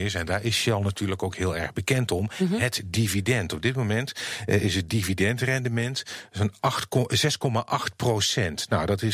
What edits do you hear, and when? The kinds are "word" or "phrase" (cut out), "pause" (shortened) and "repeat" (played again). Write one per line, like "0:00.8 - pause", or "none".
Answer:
none